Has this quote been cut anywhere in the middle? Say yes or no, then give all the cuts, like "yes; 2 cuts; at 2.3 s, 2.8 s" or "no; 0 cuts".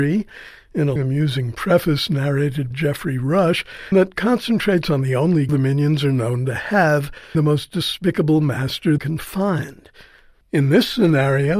yes; 6 cuts; at 1.0 s, 2.7 s, 3.9 s, 5.5 s, 7.3 s, 9.0 s